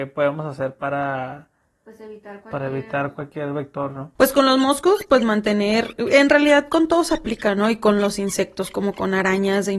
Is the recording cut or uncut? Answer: cut